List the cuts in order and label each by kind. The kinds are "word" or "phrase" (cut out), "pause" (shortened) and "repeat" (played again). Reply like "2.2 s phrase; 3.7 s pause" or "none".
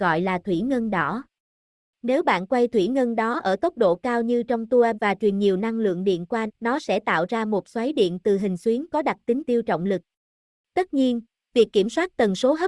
4.9 s word; 6.5 s word; 9.4 s word